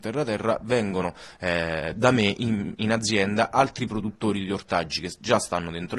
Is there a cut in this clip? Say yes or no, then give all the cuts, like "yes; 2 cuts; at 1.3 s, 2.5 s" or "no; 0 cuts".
no; 0 cuts